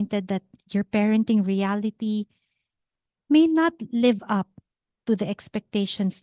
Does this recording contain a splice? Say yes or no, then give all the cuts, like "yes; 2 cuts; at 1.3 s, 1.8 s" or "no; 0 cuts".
no; 0 cuts